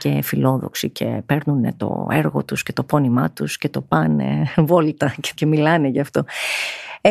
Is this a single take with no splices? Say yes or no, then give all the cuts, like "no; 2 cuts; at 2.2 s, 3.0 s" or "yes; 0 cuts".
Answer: no; 1 cut; at 5.4 s